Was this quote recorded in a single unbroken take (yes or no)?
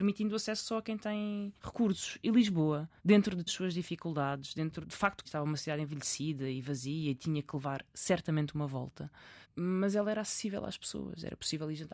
no